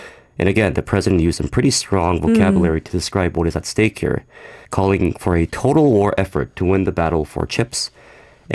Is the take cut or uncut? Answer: cut